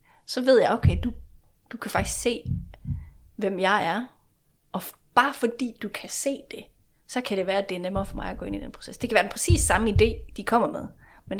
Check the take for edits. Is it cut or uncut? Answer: uncut